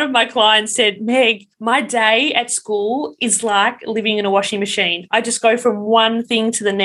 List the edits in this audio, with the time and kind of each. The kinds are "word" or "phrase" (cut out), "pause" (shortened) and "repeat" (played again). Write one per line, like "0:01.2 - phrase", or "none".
0:01.5 - pause